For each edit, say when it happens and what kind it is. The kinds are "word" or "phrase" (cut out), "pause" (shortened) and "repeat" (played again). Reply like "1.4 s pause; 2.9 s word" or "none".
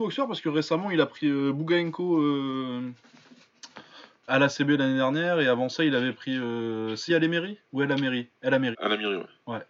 4.3 s word; 7.1 s phrase; 7.6 s pause; 8.7 s phrase